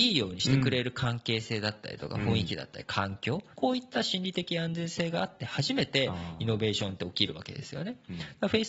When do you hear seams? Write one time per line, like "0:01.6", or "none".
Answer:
0:03.5